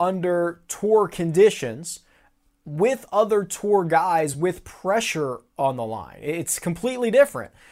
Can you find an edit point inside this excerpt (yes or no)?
no